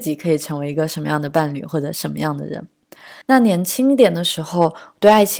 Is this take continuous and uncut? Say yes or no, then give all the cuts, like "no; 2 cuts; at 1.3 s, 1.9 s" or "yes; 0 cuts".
no; 1 cut; at 3.2 s